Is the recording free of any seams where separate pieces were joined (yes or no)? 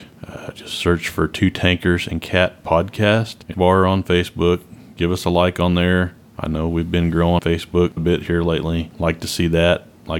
no